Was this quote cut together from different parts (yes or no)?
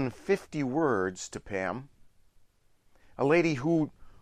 no